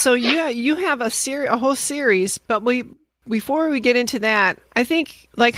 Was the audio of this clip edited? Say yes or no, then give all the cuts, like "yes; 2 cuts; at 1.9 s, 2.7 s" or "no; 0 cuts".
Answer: no; 0 cuts